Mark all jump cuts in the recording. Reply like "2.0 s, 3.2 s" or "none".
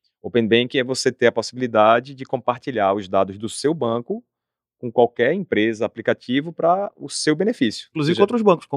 none